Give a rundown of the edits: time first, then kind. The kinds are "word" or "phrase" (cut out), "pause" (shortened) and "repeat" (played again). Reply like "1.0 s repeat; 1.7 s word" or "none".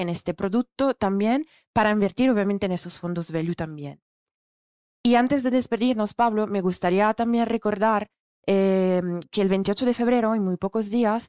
none